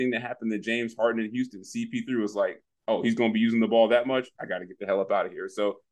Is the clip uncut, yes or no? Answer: yes